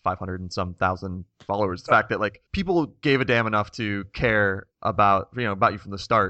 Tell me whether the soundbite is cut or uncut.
cut